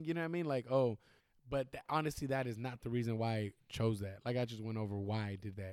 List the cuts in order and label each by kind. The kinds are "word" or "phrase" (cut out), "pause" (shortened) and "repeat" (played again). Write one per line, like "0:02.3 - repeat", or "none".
0:01.2 - pause